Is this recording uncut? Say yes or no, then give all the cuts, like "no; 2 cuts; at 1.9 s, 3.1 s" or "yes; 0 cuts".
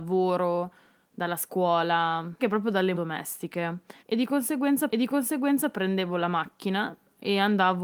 no; 4 cuts; at 2.4 s, 2.9 s, 4.0 s, 4.9 s